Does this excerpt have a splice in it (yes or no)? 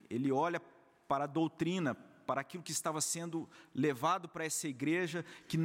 no